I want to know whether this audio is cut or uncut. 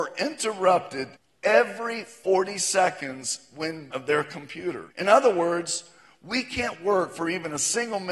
cut